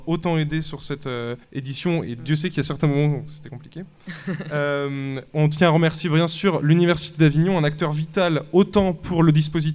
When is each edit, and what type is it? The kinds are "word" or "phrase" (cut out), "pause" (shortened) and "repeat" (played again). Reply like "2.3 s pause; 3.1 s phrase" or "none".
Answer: 1.4 s pause